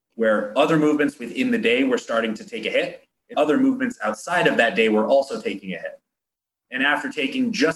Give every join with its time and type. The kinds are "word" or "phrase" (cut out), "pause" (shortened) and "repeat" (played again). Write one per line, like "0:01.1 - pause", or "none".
0:03.3 - word